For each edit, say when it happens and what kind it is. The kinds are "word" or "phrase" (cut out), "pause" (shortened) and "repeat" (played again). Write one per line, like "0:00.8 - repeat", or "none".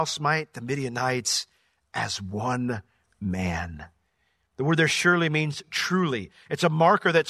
none